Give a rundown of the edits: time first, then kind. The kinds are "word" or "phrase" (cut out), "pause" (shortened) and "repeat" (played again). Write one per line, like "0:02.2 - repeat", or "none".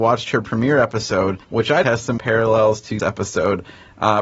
0:01.4 - pause
0:01.8 - phrase
0:02.2 - word
0:03.0 - word